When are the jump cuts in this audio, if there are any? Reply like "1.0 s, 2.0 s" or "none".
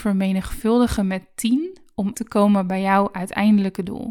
2.1 s